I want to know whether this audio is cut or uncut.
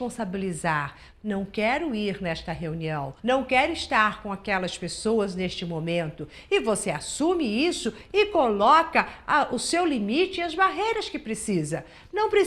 cut